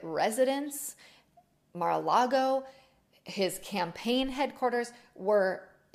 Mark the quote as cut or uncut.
uncut